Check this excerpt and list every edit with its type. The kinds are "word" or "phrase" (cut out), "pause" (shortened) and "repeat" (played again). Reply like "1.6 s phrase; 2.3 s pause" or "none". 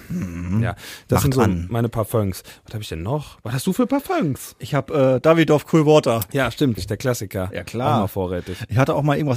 6.8 s word